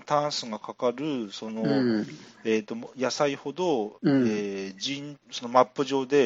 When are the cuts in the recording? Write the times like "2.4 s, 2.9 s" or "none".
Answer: 4.0 s, 5.2 s